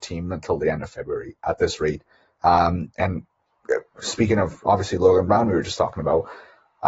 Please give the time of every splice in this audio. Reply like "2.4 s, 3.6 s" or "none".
none